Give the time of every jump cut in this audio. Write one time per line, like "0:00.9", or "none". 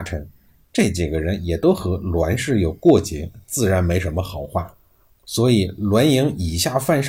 none